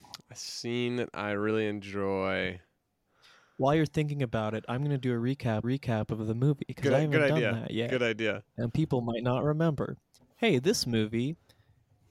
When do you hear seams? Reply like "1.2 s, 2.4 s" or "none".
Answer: 5.6 s, 10.2 s